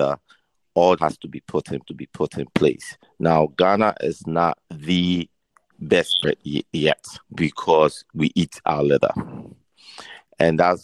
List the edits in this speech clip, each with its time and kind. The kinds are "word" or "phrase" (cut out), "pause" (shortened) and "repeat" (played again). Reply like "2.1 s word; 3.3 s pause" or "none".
1.0 s word; 1.8 s repeat; 4.6 s pause; 6.2 s phrase; 7.2 s pause